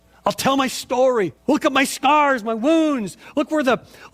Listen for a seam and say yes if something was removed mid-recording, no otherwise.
yes